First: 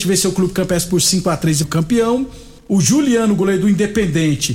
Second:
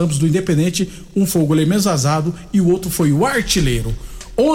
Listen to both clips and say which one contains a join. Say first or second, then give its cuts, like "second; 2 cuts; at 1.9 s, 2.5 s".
first; 2 cuts; at 1.6 s, 2.6 s